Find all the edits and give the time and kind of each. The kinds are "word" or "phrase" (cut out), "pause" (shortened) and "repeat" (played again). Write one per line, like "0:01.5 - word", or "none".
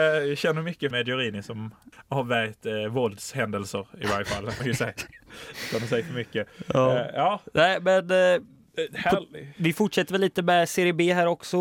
0:00.9 - phrase
0:01.9 - pause
0:04.6 - word